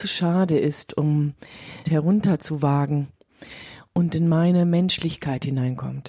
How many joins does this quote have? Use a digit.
1